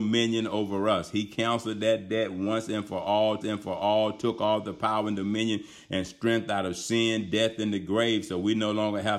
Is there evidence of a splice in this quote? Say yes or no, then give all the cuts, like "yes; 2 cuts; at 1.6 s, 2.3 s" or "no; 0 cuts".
yes; 1 cut; at 3.4 s